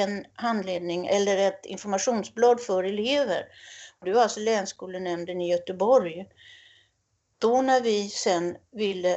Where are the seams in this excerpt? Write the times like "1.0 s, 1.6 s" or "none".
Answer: none